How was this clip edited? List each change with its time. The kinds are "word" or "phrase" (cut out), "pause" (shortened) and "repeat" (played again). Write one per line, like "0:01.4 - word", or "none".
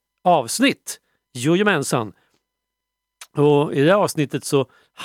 none

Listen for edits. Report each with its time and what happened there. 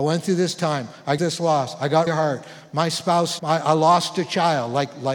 0:01.2 - word
0:02.1 - word
0:03.4 - word

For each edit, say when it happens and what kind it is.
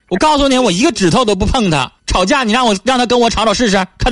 0:02.0 - pause

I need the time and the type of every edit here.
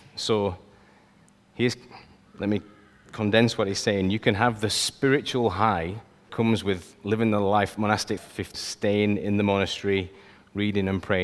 0:06.3 - word
0:08.2 - word
0:08.5 - word

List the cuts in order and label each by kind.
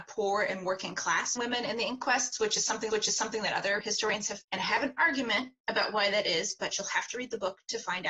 0:01.4 - phrase
0:02.9 - repeat
0:04.4 - word

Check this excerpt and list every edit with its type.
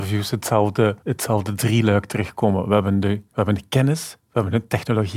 0:01.0 - pause
0:03.3 - pause

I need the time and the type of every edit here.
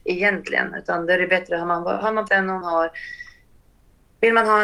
0:02.3 - word
0:02.6 - word

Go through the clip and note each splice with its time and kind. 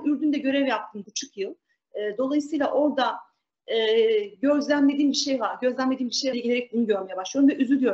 0:01.0 - word
0:06.3 - phrase

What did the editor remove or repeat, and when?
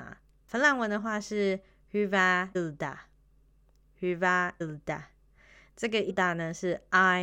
0:02.5 - word
0:04.6 - word
0:06.1 - word

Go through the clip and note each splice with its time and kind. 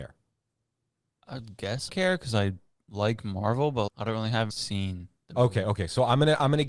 0:01.9 - word
0:03.9 - word
0:04.5 - phrase

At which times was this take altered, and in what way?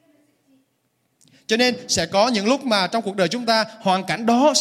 none

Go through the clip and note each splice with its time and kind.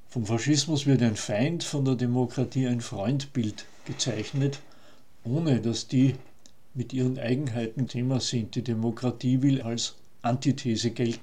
0:07.9 - word
0:09.6 - word

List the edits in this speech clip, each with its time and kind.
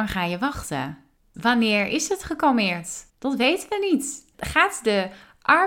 0:01.2 - pause
0:03.1 - pause

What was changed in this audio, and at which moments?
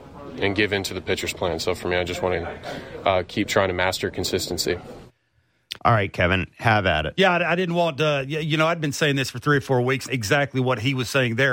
0:05.8 - pause
0:10.1 - word

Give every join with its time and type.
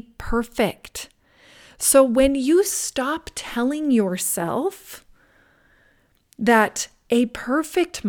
none

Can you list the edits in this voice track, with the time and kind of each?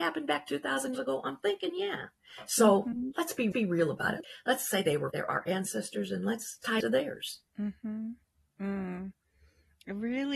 0:00.9 - word
0:03.5 - repeat
0:05.1 - word
0:06.8 - phrase
0:07.5 - pause

